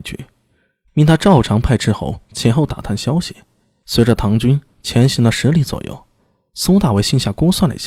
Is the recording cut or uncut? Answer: uncut